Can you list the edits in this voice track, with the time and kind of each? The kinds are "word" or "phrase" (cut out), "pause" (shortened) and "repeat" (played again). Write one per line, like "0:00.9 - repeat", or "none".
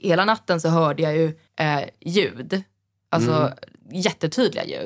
0:01.5 - pause